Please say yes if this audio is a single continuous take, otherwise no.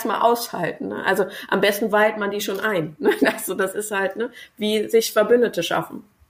yes